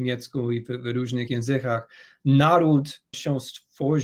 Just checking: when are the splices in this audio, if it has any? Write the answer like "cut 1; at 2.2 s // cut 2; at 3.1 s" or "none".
cut 1; at 1.3 s // cut 2; at 3.1 s